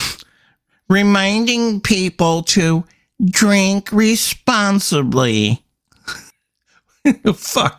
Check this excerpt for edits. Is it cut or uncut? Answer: cut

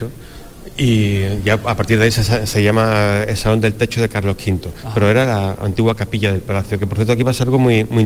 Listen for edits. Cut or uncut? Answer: uncut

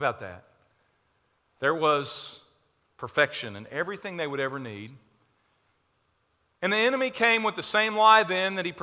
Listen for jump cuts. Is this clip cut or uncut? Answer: uncut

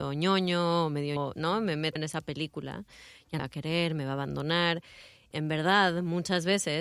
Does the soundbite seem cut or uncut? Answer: cut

